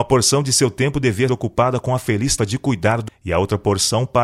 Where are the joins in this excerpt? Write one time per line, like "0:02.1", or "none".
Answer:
0:01.3
0:02.4
0:03.1